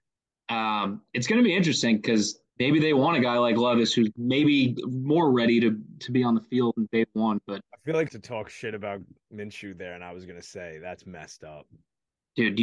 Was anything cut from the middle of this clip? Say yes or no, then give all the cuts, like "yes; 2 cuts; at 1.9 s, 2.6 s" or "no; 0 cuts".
yes; 2 cuts; at 2.5 s, 8.1 s